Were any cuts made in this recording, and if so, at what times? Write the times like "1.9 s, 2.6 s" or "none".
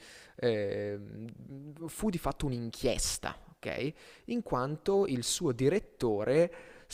none